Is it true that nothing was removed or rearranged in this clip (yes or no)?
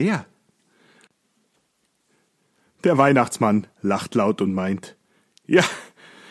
no